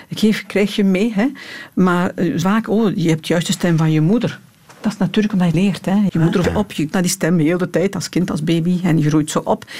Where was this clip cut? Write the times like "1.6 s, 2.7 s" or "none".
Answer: 2.4 s, 5.5 s, 6.1 s, 6.4 s, 6.9 s